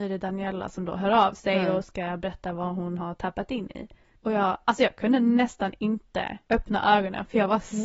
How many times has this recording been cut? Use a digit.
2